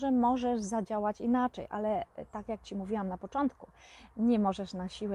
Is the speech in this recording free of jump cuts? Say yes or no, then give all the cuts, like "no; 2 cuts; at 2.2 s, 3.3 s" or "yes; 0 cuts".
yes; 0 cuts